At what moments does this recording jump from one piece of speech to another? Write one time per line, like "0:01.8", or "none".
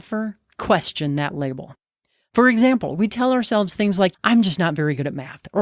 none